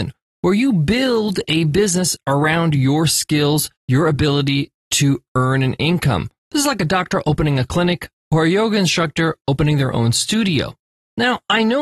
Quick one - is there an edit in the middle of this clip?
yes; 2 cuts; at 3.8 s, 8.2 s

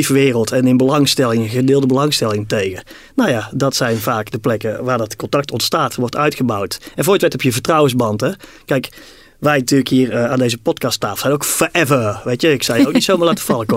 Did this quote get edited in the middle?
no; 0 cuts

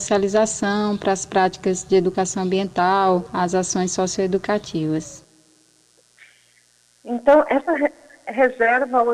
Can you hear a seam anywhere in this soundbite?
no; 0 cuts

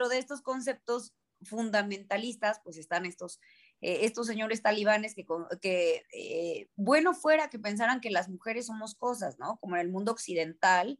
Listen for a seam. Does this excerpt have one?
no; 0 cuts

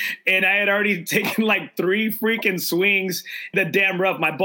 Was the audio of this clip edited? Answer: yes; 1 cut; at 3.5 s

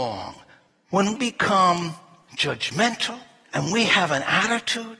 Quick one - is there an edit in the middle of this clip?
yes; 2 cuts; at 1.1 s, 3.7 s

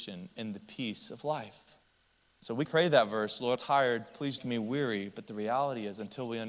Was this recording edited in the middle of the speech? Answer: yes; 4 cuts; at 2.2 s, 2.6 s, 3.6 s, 4.4 s

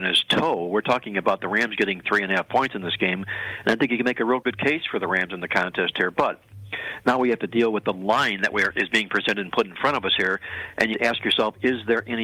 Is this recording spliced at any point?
yes; 2 cuts; at 2.0 s, 10.9 s

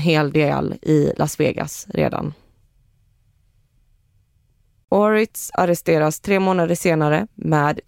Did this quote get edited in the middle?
no; 0 cuts

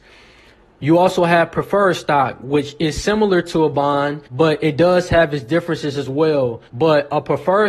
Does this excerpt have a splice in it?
yes; 2 cuts; at 4.3 s, 6.7 s

